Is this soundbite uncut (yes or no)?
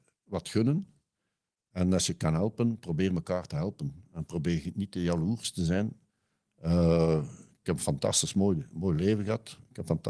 yes